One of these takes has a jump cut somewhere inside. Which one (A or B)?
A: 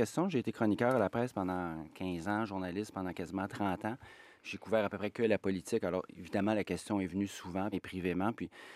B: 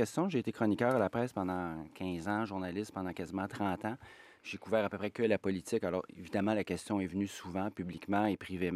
A